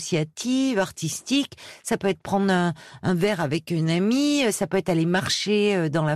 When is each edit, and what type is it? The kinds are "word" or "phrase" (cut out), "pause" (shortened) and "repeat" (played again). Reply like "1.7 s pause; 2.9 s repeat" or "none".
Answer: none